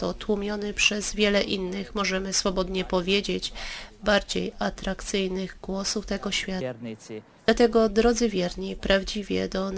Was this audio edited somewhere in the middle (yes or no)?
no